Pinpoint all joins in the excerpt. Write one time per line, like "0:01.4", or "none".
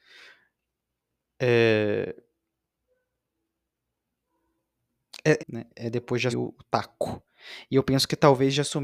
0:05.4
0:05.7
0:06.3